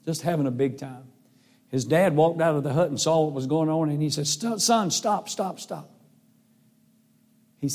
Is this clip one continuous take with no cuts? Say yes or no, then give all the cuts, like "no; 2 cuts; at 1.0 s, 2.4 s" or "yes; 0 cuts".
yes; 0 cuts